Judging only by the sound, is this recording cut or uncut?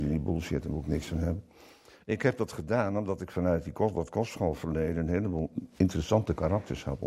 uncut